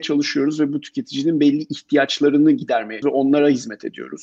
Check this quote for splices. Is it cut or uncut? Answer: cut